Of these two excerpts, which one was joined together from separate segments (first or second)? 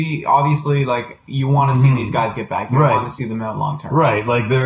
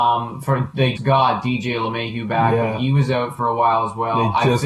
second